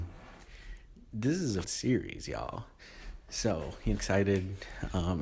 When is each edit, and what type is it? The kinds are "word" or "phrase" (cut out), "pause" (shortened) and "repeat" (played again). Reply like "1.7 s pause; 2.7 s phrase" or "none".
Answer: 1.6 s word; 3.9 s phrase